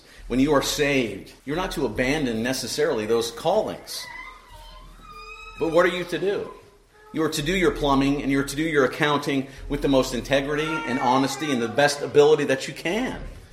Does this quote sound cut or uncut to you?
cut